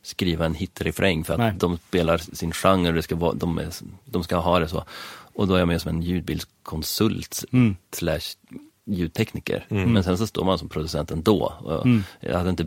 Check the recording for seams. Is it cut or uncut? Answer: uncut